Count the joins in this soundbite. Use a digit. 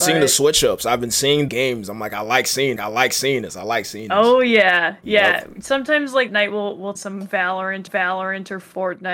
5